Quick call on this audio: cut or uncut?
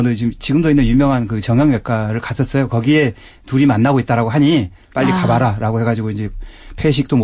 uncut